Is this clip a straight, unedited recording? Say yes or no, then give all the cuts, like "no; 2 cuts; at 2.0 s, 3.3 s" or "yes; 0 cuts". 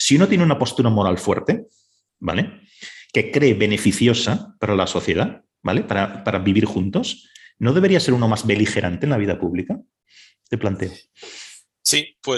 yes; 0 cuts